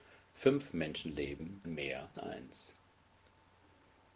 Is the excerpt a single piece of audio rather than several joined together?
no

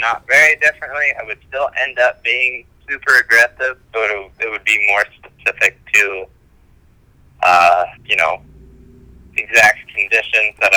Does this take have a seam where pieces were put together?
yes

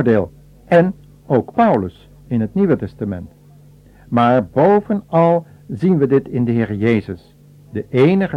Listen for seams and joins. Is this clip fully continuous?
yes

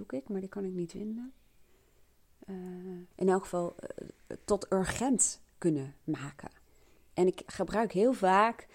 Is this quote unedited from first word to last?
no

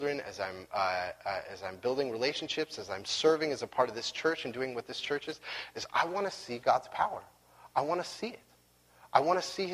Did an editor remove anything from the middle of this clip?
no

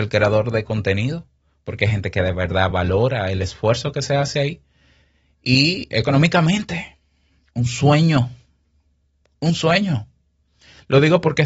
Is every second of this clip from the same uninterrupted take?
yes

